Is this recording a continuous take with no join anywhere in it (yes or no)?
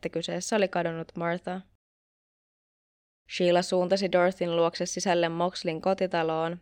yes